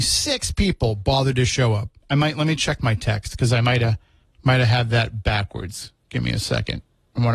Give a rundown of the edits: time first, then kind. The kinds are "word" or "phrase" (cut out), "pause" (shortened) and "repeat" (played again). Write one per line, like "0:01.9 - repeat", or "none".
0:02.0 - pause
0:04.2 - pause